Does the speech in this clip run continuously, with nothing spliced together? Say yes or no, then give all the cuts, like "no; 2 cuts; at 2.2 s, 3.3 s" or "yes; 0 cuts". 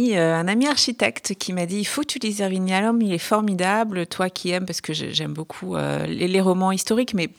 yes; 0 cuts